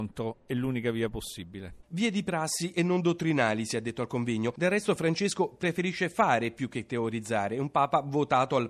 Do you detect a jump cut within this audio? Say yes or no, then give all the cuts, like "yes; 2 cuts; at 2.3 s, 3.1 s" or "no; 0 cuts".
no; 0 cuts